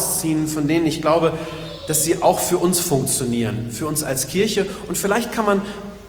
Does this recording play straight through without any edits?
yes; 0 cuts

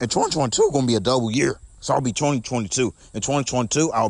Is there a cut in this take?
yes; 1 cut; at 1.8 s

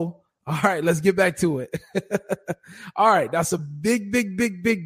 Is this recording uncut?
yes; 0 cuts

